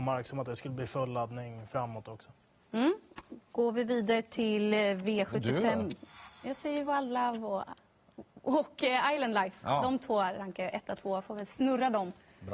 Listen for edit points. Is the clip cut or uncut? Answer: uncut